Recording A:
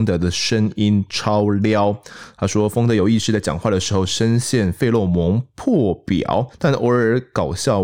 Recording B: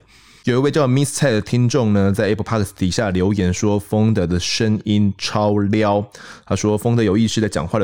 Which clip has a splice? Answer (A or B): A